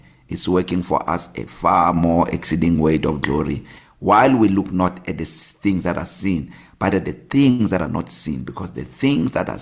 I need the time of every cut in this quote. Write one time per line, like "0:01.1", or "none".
none